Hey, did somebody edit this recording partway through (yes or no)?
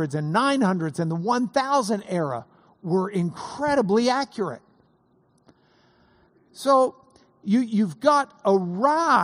no